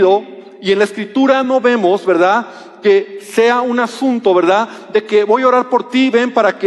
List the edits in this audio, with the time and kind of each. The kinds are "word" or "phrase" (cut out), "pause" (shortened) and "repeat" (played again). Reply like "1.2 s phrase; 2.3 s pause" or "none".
none